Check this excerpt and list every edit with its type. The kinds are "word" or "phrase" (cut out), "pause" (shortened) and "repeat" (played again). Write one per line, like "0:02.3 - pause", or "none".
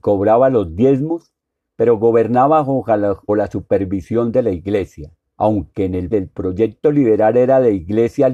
0:03.3 - word
0:05.2 - pause
0:06.1 - word